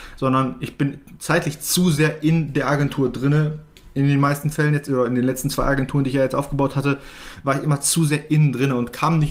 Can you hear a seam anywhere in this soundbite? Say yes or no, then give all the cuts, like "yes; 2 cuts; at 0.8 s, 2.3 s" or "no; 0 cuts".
no; 0 cuts